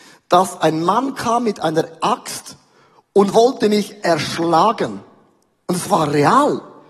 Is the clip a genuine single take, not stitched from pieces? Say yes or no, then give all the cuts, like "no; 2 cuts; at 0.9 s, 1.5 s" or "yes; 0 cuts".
yes; 0 cuts